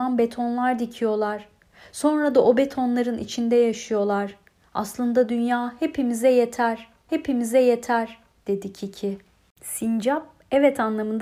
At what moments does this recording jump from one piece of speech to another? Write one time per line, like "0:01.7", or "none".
0:07.1